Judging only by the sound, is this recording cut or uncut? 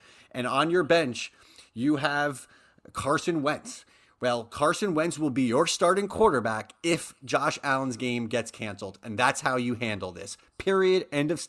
uncut